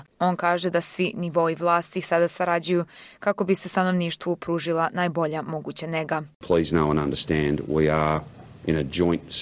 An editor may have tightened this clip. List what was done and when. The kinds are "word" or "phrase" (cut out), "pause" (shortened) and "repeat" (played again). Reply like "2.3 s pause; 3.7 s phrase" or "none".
none